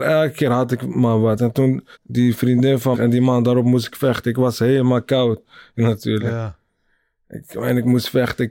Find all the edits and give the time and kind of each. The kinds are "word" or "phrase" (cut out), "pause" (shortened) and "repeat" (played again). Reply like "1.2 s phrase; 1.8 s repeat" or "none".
1.9 s pause; 2.9 s phrase; 5.8 s phrase